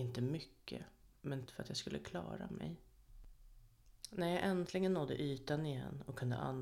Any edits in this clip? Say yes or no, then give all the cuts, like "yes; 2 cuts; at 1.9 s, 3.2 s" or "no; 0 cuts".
yes; 1 cut; at 1.5 s